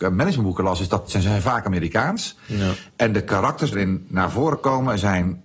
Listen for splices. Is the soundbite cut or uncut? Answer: cut